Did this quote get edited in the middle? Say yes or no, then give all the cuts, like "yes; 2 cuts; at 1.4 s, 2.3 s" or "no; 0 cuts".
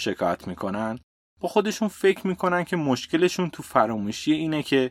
no; 0 cuts